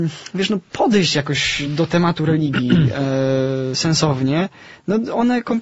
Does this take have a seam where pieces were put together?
no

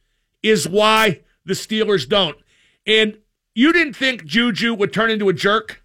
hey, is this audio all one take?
yes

